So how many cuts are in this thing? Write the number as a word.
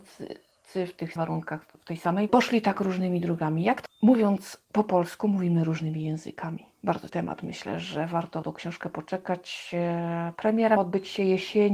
six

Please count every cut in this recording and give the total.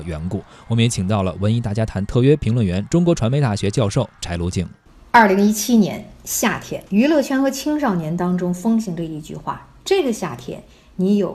two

